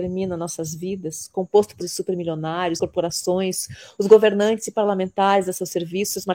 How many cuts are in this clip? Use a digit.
2